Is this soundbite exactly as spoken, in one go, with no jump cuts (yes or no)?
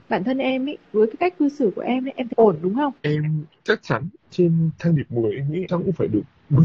no